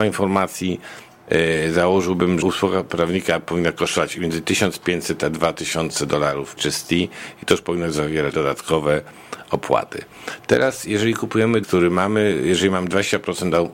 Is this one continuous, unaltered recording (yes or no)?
no